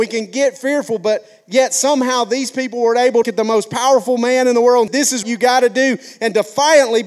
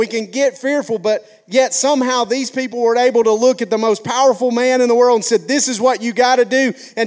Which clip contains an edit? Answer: first; 3 cuts; at 3.2 s, 4.9 s, 5.2 s

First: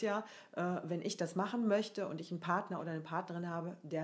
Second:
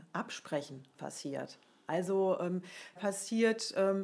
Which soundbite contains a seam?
second; 2 cuts; at 0.9 s, 3.0 s

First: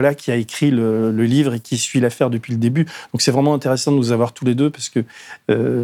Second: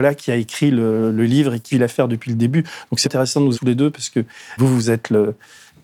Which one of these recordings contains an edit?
second; 4 cuts; at 1.7 s, 3.0 s, 3.5 s, 4.6 s

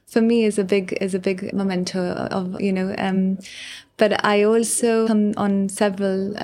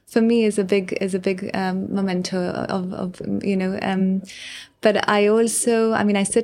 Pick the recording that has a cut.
first; 3 cuts; at 1.5 s, 2.6 s, 5.1 s

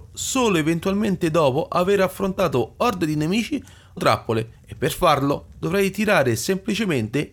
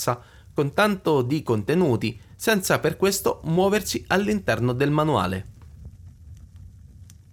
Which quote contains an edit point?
first; 2 cuts; at 4.0 s, 4.6 s

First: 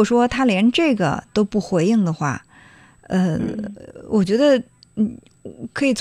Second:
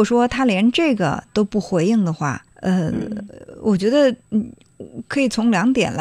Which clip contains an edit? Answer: second; 2 cuts; at 2.5 s, 4.2 s

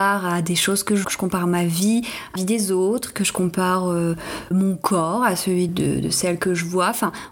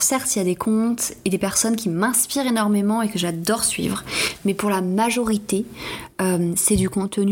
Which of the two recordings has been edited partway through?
first; 4 cuts; at 1.0 s, 2.4 s, 4.5 s, 5.7 s

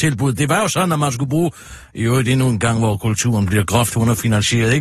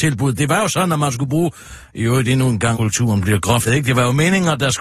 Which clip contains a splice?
second; 2 cuts; at 2.7 s, 3.7 s

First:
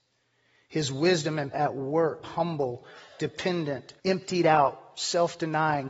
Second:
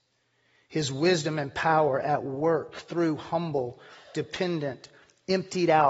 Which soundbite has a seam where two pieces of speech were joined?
first; 3 cuts; at 1.5 s, 2.2 s, 4.0 s

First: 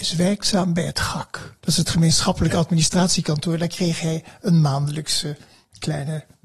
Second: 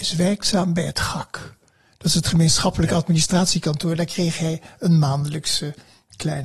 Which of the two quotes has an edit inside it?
first; 1 cut; at 1.6 s

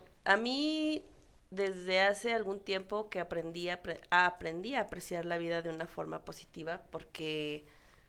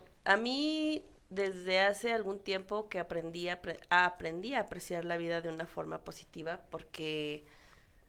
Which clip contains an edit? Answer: second; 1 cut; at 1.2 s

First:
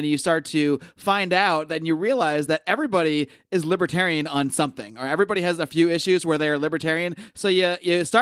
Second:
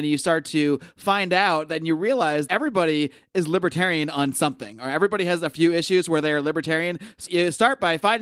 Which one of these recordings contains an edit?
second; 2 cuts; at 2.5 s, 7.3 s

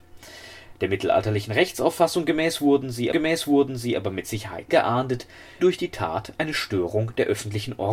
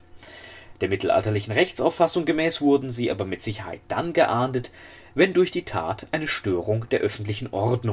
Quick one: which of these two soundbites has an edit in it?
first; 3 cuts; at 3.1 s, 4.7 s, 5.6 s

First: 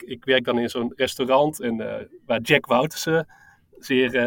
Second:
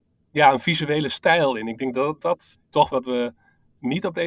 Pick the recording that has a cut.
second; 2 cuts; at 2.2 s, 2.9 s

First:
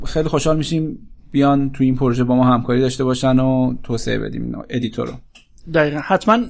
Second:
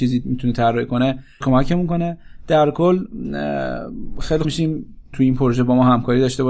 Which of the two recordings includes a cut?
second; 3 cuts; at 1.4 s, 4.4 s, 5.1 s

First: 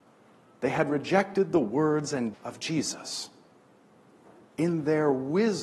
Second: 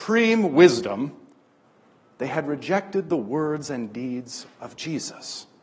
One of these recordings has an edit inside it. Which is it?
first; 1 cut; at 2.3 s

